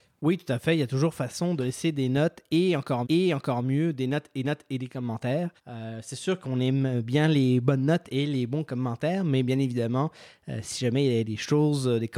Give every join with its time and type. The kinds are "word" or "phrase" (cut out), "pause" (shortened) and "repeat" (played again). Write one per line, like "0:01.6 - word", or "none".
0:03.0 - repeat
0:04.4 - repeat
0:05.6 - pause
0:11.2 - word